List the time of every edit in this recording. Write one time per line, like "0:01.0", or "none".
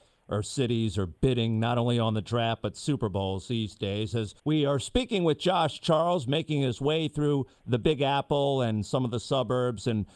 0:04.4